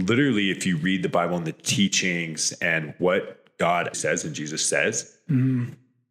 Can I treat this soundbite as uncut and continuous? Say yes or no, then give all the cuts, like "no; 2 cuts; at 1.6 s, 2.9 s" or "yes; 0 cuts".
no; 1 cut; at 3.9 s